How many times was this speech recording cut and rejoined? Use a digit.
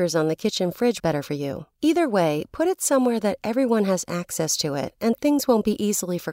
2